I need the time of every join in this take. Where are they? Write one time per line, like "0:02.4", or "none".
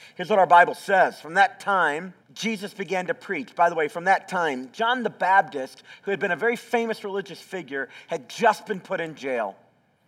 0:02.2

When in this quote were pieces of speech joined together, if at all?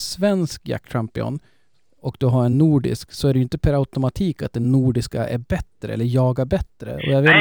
none

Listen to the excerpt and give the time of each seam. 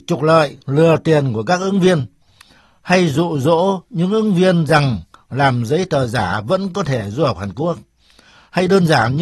none

